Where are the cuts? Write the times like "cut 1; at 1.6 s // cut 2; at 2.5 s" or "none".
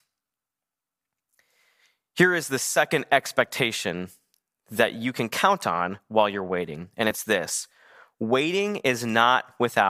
none